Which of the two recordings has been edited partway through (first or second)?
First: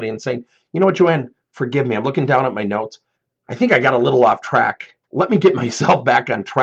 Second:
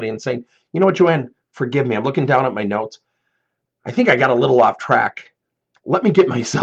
first